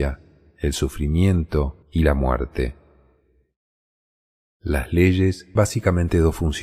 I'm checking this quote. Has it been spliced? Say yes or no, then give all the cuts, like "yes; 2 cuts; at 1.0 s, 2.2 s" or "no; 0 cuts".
yes; 2 cuts; at 1.8 s, 5.6 s